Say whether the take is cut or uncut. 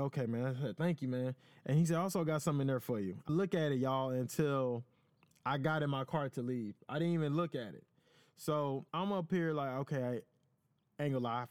cut